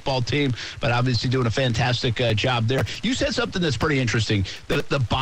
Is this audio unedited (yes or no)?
yes